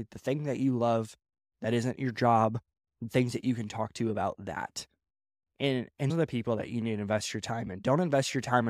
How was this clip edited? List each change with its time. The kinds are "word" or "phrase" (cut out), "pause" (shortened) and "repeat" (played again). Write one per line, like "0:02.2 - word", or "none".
0:06.1 - word